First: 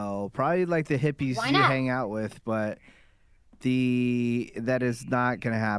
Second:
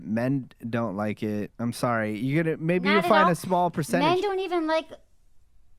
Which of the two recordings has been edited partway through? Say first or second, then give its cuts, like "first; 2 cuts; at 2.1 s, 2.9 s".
second; 1 cut; at 1.5 s